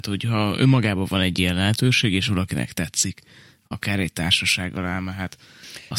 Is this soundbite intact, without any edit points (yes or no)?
yes